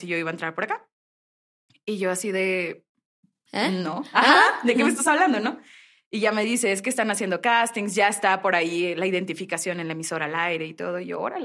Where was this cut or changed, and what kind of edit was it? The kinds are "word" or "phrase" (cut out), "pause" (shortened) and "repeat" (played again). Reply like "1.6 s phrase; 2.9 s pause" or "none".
none